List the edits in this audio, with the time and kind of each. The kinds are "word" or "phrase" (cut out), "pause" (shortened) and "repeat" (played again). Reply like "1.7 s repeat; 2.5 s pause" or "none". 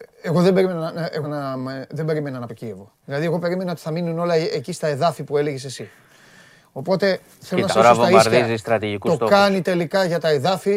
1.2 s word; 2.5 s phrase; 3.0 s pause; 7.7 s word